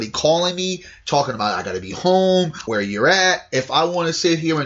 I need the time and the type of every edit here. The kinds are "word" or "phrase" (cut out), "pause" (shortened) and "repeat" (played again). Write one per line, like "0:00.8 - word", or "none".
0:02.7 - word